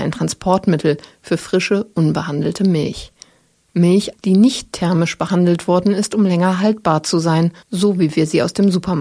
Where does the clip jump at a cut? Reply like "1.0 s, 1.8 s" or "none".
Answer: 4.1 s, 7.6 s